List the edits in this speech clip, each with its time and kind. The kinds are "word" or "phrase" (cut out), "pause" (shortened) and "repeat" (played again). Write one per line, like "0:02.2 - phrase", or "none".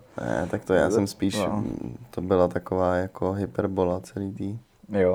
none